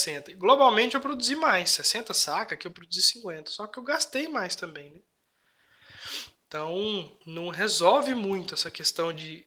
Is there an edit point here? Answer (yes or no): yes